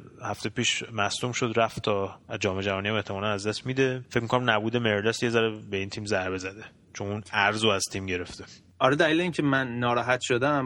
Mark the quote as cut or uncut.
uncut